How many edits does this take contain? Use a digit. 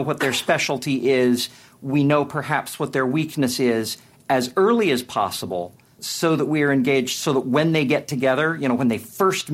1